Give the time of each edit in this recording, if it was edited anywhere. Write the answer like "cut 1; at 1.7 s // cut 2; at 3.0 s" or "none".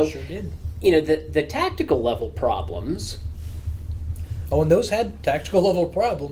none